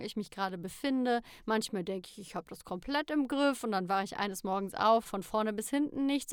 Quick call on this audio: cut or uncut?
cut